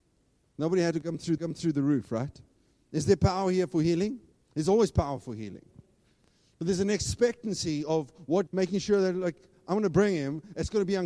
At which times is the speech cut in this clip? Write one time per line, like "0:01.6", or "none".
0:01.4
0:02.6
0:04.3
0:08.5